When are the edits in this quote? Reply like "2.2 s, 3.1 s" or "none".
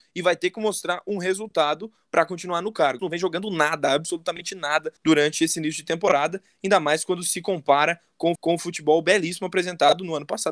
3.0 s, 5.0 s, 8.4 s